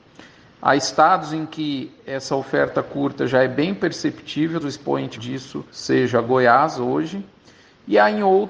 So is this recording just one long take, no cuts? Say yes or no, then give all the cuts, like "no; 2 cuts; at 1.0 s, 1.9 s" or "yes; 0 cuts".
no; 3 cuts; at 4.6 s, 5.2 s, 5.7 s